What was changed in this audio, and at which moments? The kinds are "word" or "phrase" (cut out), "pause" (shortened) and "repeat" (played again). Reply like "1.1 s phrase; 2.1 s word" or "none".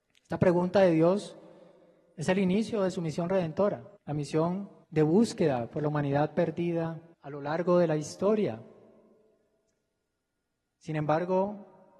4.0 s pause; 4.8 s pause; 7.1 s pause